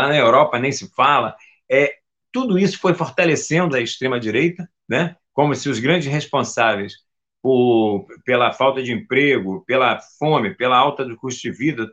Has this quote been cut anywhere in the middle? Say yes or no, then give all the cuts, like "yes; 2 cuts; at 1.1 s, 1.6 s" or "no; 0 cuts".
yes; 1 cut; at 3.7 s